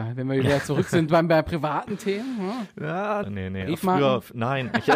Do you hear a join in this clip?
yes; 1 cut; at 3.2 s

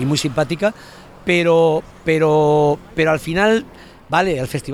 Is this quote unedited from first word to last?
yes; 0 cuts

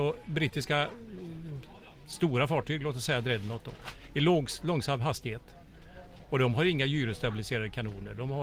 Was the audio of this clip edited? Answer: no; 0 cuts

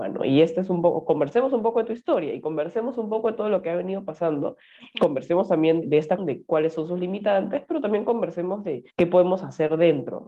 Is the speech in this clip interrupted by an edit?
yes; 3 cuts; at 5.8 s, 6.2 s, 8.9 s

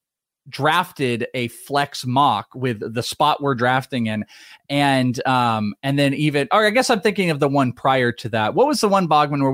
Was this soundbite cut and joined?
no; 0 cuts

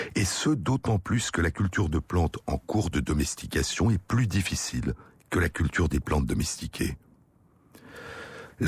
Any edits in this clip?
no; 0 cuts

